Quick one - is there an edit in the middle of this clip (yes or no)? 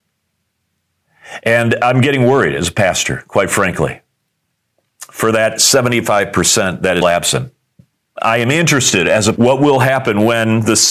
yes